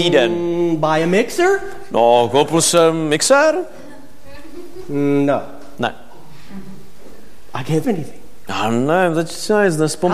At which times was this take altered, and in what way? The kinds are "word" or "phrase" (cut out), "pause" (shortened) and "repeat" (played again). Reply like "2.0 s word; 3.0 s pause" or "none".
7.8 s phrase